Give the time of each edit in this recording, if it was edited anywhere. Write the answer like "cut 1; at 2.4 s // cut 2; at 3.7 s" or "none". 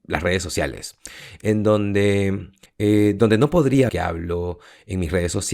cut 1; at 2.7 s // cut 2; at 3.9 s